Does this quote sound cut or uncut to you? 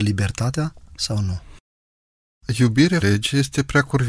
cut